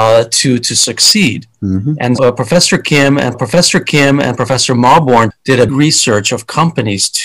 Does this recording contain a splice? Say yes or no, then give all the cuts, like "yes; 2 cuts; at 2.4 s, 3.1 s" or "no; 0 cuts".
yes; 4 cuts; at 2.2 s, 3.3 s, 5.3 s, 5.7 s